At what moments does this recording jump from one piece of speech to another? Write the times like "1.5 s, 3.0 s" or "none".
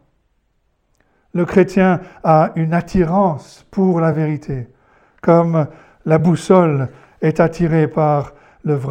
none